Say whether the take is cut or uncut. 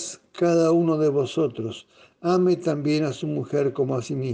uncut